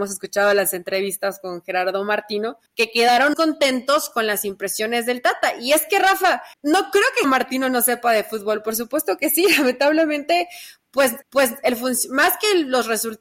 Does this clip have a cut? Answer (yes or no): yes